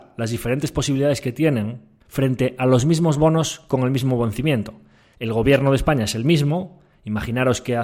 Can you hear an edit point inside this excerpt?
no; 0 cuts

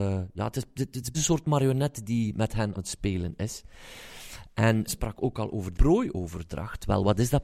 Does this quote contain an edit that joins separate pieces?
yes; 4 cuts; at 1.1 s, 2.8 s, 4.9 s, 5.7 s

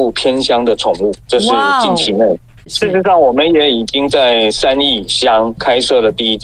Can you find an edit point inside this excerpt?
no; 0 cuts

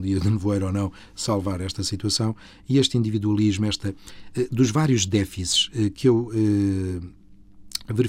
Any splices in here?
no; 0 cuts

